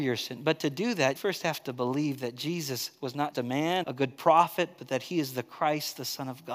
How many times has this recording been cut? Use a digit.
3